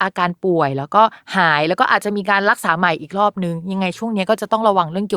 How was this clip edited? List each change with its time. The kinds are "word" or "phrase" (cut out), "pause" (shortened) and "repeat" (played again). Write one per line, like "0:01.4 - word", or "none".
none